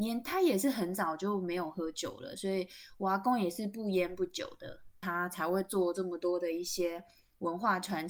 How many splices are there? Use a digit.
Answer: 0